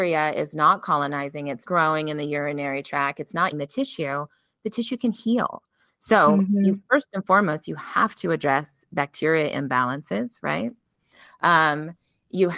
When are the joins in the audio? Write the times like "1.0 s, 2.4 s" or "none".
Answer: 1.7 s, 3.5 s